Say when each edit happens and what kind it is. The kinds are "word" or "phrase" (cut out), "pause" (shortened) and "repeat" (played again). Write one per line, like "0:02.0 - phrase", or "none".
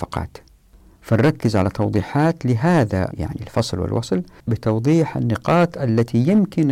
0:03.1 - word
0:04.5 - word